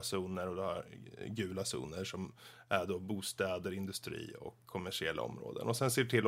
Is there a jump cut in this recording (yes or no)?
no